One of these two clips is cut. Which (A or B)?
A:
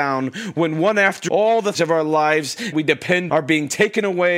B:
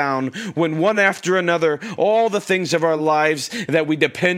A